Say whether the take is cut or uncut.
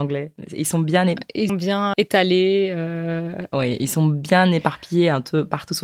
cut